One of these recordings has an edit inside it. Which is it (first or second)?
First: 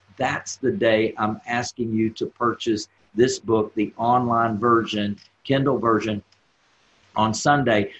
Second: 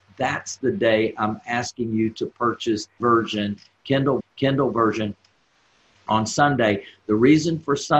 second